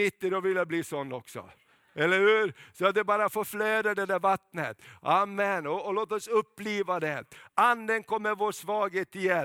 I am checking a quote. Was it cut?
no; 0 cuts

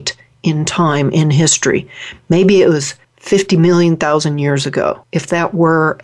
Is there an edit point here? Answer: yes; 2 cuts; at 3.0 s, 5.0 s

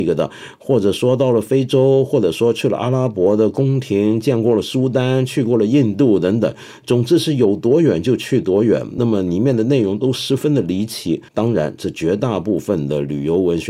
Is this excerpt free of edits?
no; 1 cut; at 11.3 s

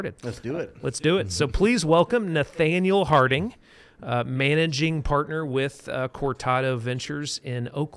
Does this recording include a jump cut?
no; 0 cuts

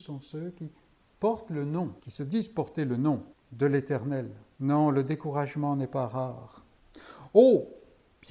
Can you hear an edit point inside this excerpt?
yes; 3 cuts; at 2.0 s, 3.3 s, 4.5 s

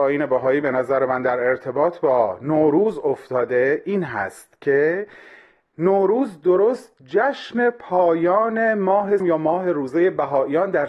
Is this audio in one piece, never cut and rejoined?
no; 1 cut; at 9.2 s

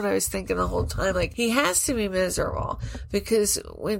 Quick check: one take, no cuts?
yes; 0 cuts

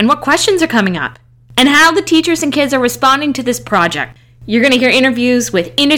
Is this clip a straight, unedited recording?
yes; 0 cuts

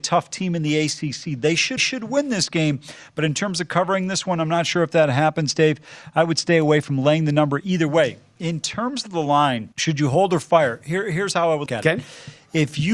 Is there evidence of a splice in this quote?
yes; 3 cuts; at 1.8 s, 9.7 s, 11.7 s

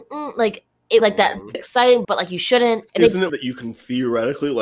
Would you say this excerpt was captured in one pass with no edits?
no; 5 cuts; at 1.0 s, 1.5 s, 2.0 s, 2.9 s, 3.3 s

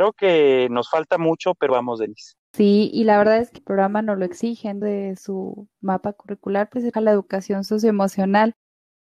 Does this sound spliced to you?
yes; 5 cuts; at 1.7 s, 2.4 s, 3.6 s, 4.8 s, 6.9 s

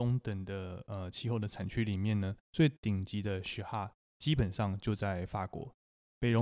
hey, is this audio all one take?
no; 1 cut; at 2.4 s

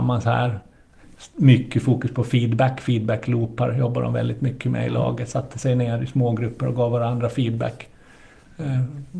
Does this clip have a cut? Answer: no; 0 cuts

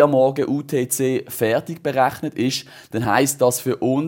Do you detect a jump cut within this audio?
no; 0 cuts

